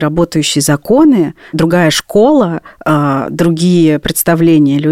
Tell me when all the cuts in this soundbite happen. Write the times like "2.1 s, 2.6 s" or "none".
1.5 s